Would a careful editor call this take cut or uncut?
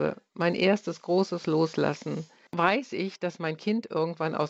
cut